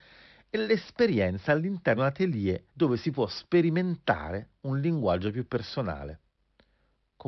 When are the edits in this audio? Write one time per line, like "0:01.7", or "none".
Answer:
0:02.0
0:02.7